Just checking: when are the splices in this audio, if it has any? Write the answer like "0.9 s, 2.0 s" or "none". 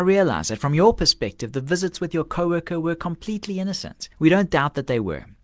4.1 s